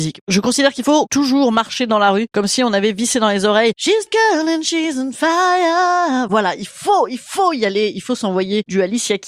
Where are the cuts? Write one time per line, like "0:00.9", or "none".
0:04.1